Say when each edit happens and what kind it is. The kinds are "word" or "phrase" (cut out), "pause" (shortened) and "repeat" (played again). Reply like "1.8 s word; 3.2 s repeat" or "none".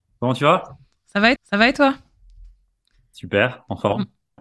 1.4 s repeat